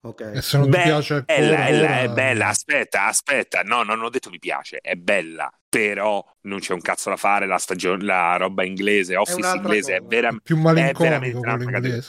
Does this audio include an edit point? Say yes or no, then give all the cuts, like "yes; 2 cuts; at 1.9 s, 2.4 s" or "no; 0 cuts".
yes; 2 cuts; at 1.7 s, 4.3 s